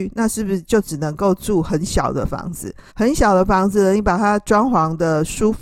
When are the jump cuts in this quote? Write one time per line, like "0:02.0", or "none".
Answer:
0:02.9